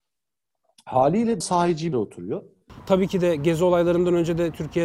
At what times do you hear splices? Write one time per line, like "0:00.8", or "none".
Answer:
0:01.4
0:01.9